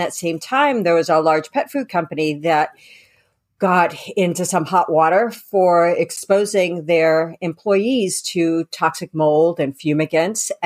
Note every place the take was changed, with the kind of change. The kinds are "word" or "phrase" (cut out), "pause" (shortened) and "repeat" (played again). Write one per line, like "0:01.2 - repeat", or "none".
none